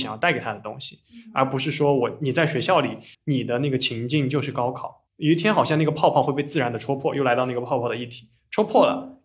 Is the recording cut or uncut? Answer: cut